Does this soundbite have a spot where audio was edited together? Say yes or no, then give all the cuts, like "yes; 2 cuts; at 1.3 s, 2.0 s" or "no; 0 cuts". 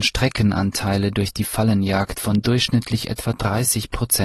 no; 0 cuts